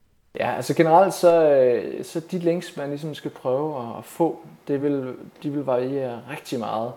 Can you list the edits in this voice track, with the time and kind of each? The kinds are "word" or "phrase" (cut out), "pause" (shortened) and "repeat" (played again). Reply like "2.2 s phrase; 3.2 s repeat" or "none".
none